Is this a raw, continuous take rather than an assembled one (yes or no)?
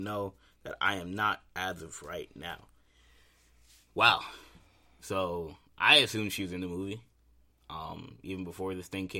yes